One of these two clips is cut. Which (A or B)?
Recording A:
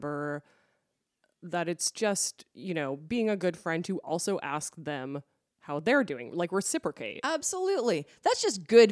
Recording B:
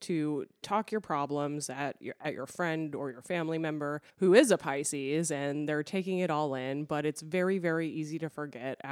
B